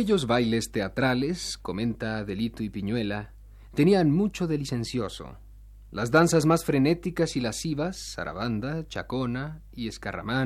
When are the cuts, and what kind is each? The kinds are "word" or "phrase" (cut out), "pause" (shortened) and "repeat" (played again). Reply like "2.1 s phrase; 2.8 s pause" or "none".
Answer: none